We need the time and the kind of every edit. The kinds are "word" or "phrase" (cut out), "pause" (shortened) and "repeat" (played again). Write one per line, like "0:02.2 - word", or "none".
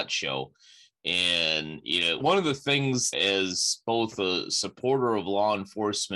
0:02.2 - word
0:03.1 - phrase

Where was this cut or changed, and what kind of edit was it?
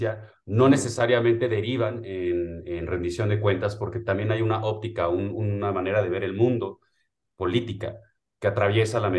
none

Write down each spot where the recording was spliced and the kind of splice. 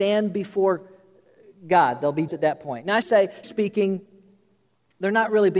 0:02.3 - word
0:03.0 - word
0:03.4 - word

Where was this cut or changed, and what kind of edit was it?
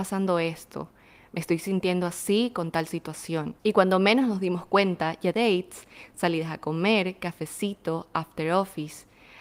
0:03.6 - pause
0:05.3 - word

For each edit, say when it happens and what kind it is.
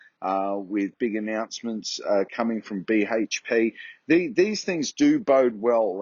none

